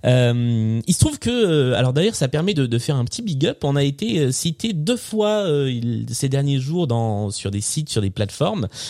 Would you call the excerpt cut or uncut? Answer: uncut